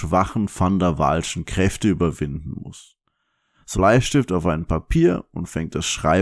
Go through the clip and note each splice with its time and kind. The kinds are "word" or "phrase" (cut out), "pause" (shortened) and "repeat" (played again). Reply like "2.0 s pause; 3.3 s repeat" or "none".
3.7 s phrase